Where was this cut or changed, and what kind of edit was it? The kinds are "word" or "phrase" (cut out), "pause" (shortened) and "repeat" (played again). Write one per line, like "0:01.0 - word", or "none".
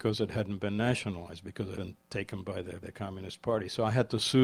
0:01.8 - word
0:02.8 - word